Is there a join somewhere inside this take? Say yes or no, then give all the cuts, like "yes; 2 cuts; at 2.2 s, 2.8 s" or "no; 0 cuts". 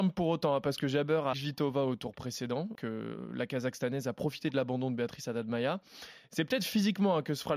yes; 2 cuts; at 1.3 s, 2.7 s